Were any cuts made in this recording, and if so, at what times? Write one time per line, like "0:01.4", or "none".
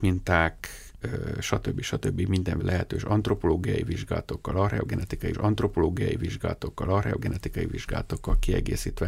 0:02.6
0:05.3